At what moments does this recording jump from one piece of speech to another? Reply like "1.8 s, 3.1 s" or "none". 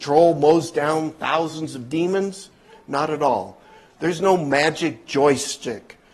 none

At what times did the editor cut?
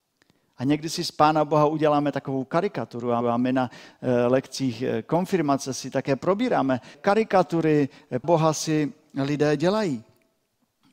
3.2 s, 6.9 s, 8.2 s

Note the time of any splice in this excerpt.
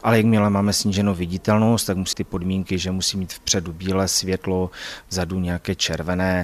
2.1 s

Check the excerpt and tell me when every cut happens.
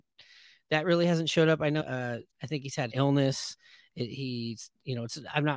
1.8 s, 2.3 s, 2.9 s

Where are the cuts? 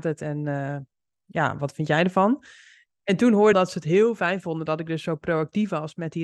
3.5 s

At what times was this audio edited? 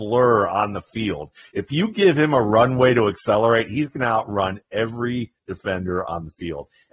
none

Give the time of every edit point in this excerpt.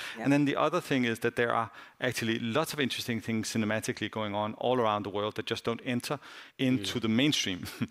6.5 s

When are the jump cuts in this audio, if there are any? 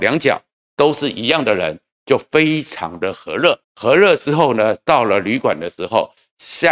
3.6 s

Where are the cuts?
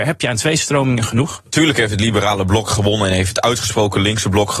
none

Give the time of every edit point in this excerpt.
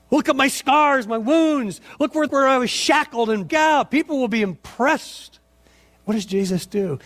2.3 s, 3.5 s

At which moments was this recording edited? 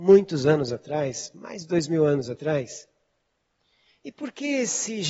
none

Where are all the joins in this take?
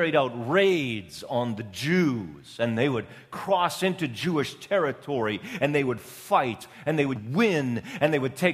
7.2 s

